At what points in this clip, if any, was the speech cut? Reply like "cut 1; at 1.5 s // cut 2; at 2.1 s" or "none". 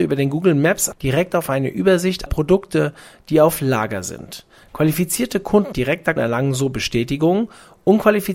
cut 1; at 0.9 s // cut 2; at 2.3 s // cut 3; at 5.7 s // cut 4; at 6.2 s